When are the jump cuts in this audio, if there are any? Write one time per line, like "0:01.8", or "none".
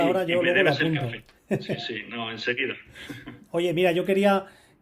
none

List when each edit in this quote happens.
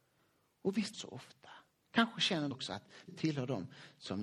0:00.9
0:01.7
0:02.5
0:03.1

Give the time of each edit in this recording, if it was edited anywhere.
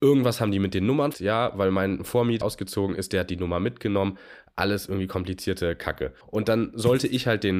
0:01.1
0:02.4
0:06.2

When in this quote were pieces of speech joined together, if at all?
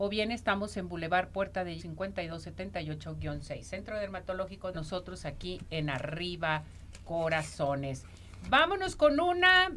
0:01.8
0:04.7

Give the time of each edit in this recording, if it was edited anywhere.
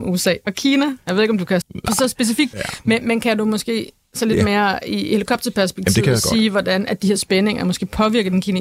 0:01.6
0:02.5

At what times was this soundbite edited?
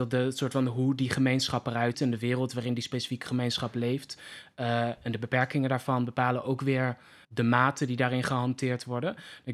0:01.9
0:07.2

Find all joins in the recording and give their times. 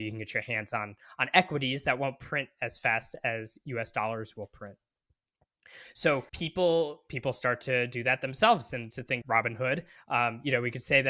0:06.3
0:08.9
0:09.2

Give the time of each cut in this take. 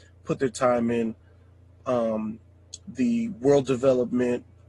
none

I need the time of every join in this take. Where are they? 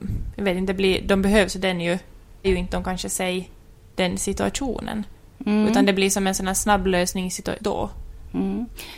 0:02.4
0:07.6

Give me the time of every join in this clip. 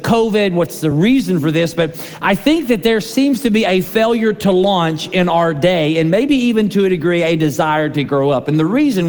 none

